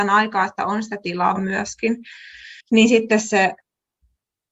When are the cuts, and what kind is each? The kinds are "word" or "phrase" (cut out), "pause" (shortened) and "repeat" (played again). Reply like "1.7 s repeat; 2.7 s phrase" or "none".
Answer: 1.4 s word; 2.6 s pause